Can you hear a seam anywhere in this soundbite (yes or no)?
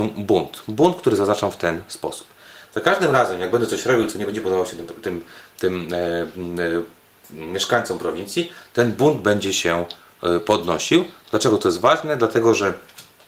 no